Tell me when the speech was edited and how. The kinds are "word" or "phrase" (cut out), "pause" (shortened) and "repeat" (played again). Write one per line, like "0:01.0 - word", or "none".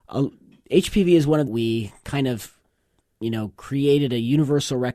0:01.5 - phrase